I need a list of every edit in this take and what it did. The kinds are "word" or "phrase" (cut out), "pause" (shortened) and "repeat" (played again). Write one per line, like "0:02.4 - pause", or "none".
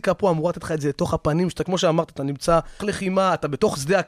0:02.8 - word